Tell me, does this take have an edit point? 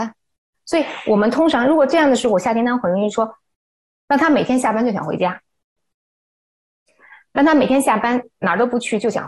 no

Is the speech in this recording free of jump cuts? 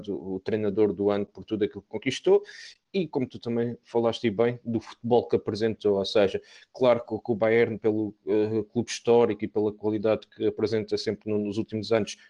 yes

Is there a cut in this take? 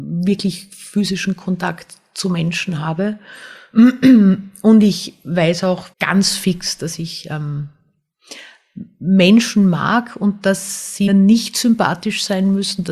yes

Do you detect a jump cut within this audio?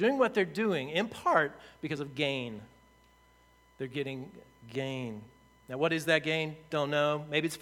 no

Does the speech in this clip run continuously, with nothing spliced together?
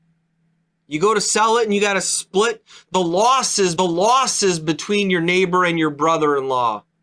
no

